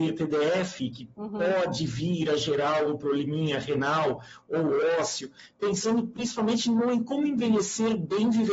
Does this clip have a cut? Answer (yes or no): no